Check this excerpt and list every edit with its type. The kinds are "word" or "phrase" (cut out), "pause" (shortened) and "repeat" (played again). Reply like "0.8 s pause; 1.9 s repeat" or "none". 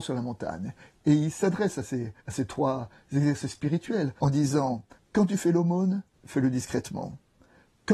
2.2 s pause; 4.2 s pause; 5.0 s pause; 6.1 s pause